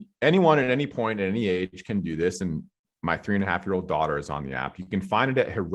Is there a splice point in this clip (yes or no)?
no